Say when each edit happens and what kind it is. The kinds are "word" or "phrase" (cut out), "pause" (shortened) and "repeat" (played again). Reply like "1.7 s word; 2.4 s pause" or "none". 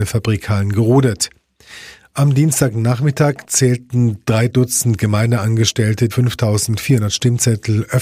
6.1 s word